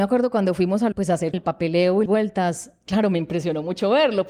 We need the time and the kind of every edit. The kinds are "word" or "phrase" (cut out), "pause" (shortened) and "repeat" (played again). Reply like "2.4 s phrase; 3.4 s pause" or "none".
0.9 s word; 1.3 s word; 2.1 s word